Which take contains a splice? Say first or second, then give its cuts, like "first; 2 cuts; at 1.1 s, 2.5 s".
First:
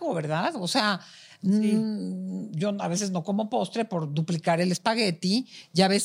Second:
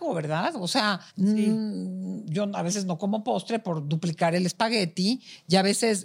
second; 1 cut; at 1.1 s